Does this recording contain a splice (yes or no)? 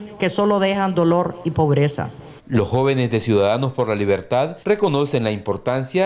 yes